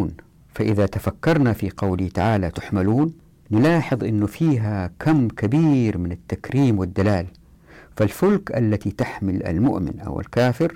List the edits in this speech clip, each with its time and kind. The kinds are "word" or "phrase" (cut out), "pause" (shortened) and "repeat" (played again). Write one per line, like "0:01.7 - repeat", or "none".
none